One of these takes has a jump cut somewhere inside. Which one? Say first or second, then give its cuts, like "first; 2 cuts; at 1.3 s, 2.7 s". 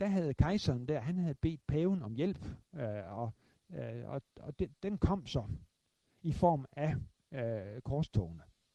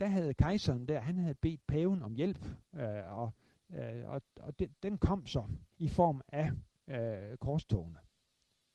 second; 1 cut; at 5.7 s